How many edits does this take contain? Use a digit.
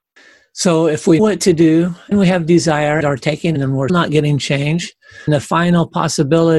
6